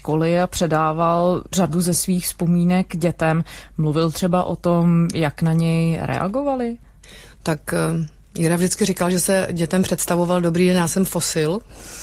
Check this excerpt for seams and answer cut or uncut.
uncut